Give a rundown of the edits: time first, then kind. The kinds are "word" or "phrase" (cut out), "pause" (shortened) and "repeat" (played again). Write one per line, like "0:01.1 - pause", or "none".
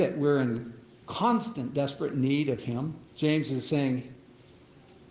0:03.1 - pause